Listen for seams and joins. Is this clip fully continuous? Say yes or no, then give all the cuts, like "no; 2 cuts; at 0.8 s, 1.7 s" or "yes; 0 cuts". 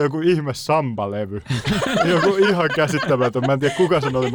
yes; 0 cuts